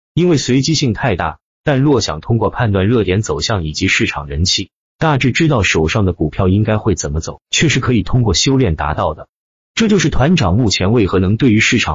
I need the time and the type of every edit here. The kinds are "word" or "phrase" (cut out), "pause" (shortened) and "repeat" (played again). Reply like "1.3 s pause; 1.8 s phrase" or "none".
none